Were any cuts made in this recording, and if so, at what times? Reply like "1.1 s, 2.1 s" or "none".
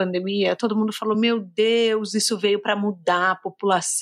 none